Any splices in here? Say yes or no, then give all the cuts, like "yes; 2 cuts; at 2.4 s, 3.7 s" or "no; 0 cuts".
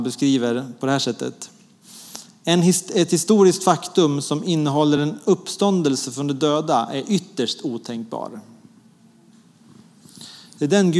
no; 0 cuts